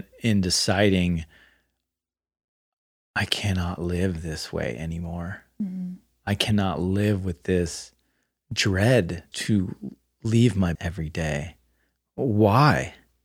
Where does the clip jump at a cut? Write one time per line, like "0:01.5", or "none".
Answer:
0:09.3
0:10.7

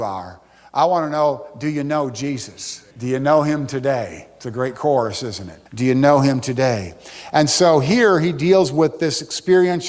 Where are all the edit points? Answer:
0:02.9
0:05.7

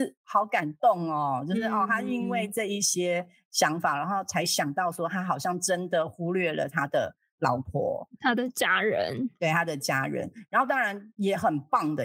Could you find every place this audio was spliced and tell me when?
none

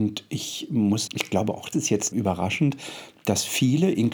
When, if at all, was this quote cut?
0:01.1
0:01.7
0:02.1

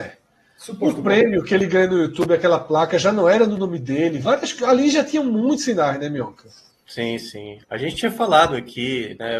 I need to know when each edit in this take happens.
0:06.7
0:07.6

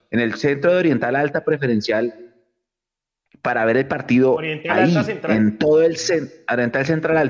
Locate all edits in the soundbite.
none

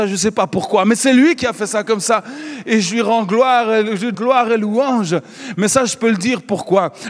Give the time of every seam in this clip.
0:04.1
0:04.5

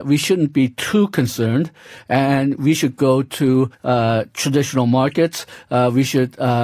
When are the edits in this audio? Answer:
0:03.7

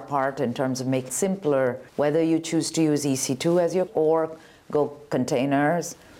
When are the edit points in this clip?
0:01.1
0:01.9
0:03.9

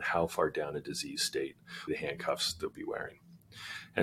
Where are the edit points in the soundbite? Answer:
0:01.9
0:02.7

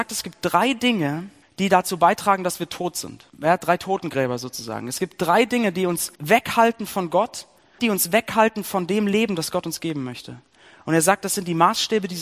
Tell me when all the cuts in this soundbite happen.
0:01.4
0:03.3
0:06.1
0:07.8

